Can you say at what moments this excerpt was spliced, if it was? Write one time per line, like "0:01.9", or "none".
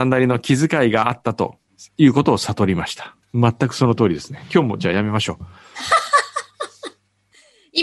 0:01.7
0:03.2